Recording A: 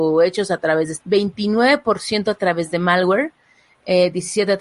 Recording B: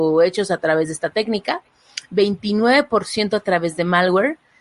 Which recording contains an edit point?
A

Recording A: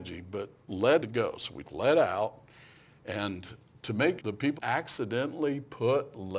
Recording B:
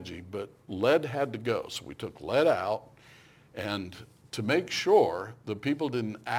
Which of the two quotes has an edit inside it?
A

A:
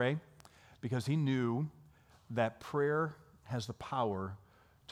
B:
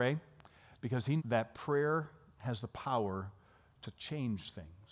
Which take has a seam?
B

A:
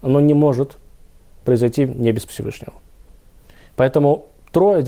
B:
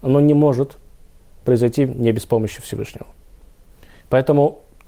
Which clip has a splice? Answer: A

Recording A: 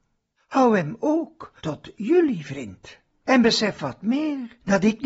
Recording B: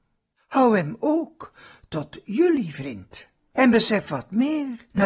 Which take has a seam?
A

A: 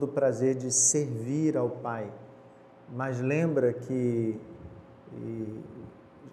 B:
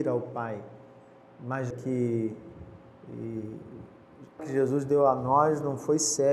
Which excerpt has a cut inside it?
B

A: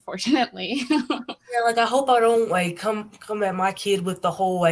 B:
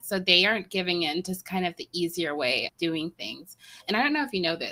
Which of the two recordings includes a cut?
B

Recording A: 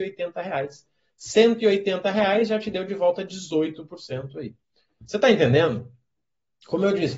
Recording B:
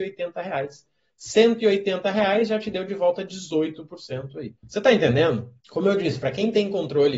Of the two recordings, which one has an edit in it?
B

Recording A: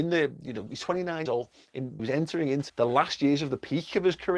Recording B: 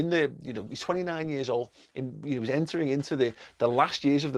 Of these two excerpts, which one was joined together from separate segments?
A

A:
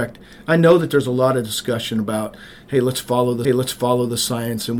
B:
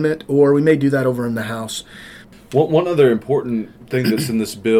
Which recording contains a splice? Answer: A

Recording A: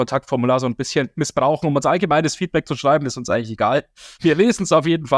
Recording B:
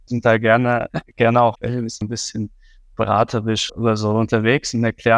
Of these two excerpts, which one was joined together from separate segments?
B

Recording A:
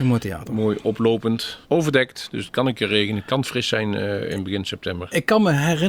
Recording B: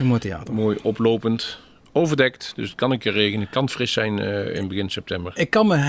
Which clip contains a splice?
A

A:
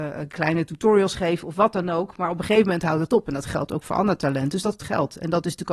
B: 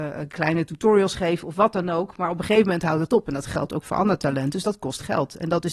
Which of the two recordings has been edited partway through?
A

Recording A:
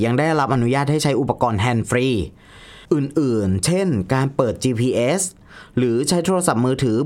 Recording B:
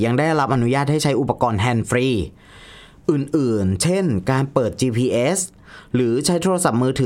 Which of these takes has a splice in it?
A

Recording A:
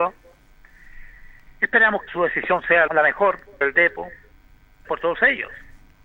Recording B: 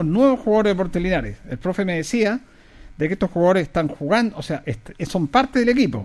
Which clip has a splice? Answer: A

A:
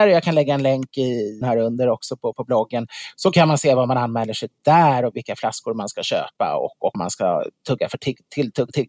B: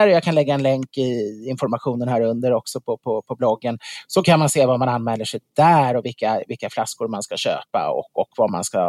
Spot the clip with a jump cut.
A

